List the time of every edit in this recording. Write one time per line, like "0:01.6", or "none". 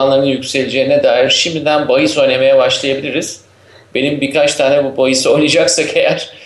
none

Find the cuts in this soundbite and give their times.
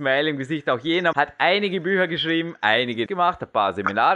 0:01.1
0:03.1

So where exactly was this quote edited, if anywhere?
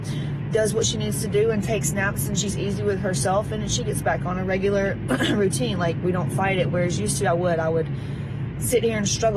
none

